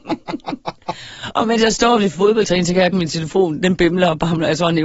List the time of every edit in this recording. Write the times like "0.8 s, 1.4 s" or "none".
2.9 s

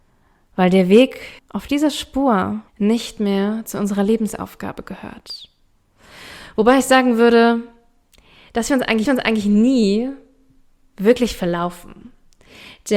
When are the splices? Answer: 1.4 s, 2.7 s, 9.1 s

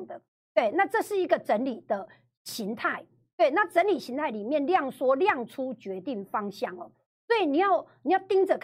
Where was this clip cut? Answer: none

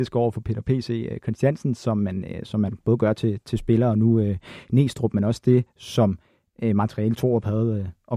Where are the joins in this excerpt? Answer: none

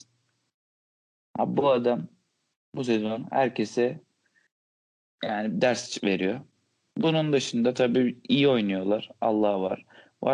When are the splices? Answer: none

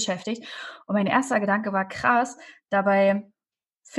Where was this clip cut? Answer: none

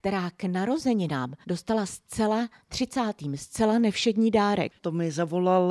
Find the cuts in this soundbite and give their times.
1.4 s, 2.7 s, 4.8 s

